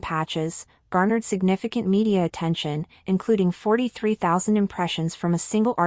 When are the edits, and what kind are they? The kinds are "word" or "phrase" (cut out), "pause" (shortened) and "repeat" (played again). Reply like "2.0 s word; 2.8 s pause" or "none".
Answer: none